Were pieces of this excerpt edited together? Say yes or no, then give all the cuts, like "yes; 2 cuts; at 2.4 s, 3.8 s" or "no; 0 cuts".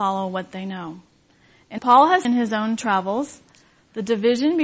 yes; 2 cuts; at 1.8 s, 2.2 s